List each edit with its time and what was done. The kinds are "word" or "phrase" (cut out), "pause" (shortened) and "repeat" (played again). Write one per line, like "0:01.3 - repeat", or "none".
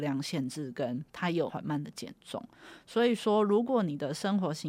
0:01.1 - pause